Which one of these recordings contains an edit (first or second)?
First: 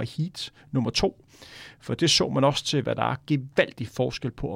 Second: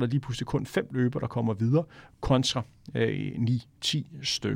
first